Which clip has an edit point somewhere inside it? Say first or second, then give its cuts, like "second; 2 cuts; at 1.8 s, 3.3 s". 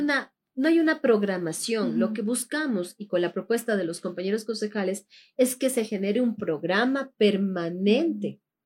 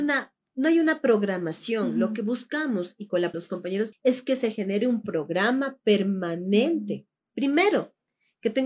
second; 2 cuts; at 3.3 s, 3.9 s